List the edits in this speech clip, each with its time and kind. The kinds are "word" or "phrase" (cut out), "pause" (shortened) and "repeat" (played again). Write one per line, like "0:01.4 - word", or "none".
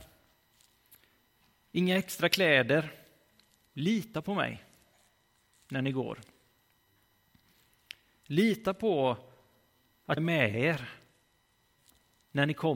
0:10.2 - word